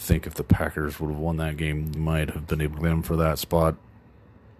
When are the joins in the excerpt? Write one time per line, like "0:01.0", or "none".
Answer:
0:01.9
0:02.8